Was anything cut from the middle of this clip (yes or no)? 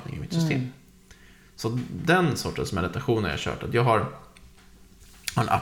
no